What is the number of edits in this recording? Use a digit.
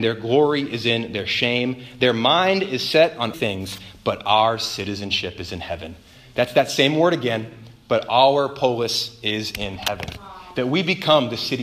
1